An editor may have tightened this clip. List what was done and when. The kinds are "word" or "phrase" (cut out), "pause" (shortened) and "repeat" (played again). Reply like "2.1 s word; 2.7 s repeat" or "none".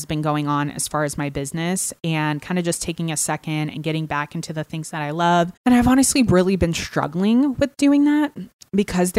5.6 s pause

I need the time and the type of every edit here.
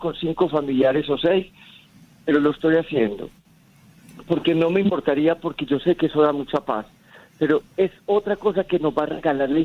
none

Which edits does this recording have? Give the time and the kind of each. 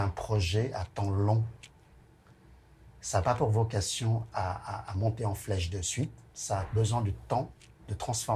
6.3 s pause

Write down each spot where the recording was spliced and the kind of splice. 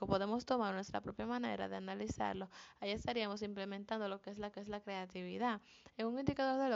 4.5 s repeat

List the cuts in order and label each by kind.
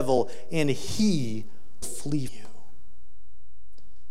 1.8 s word; 2.3 s word

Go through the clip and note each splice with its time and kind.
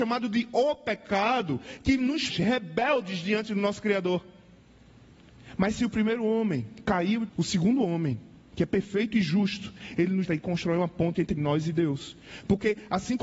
2.3 s word; 7.3 s word; 10.2 s word

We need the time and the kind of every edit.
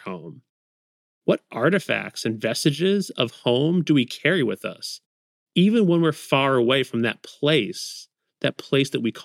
none

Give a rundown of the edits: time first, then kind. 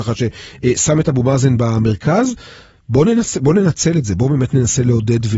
none

